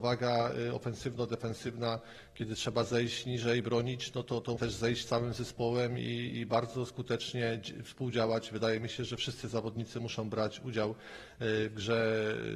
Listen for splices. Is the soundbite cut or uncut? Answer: cut